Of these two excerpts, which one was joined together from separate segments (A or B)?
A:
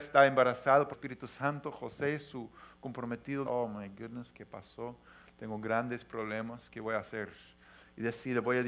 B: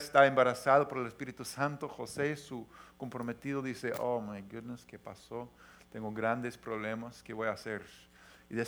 A